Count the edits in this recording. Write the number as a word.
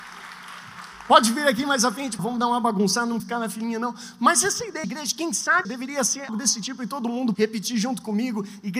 six